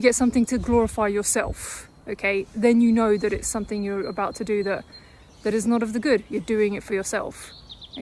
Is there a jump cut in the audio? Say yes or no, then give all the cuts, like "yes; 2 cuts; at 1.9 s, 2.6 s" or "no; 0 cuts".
no; 0 cuts